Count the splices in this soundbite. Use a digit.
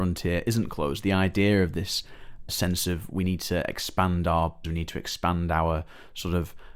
2